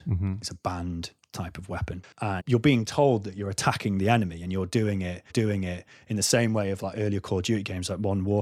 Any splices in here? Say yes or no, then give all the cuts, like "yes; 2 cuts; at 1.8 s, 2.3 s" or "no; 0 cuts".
yes; 2 cuts; at 2.4 s, 5.3 s